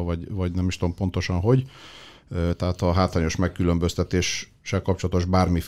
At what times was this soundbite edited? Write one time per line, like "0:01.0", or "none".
none